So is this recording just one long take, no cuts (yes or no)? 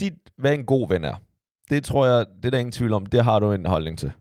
yes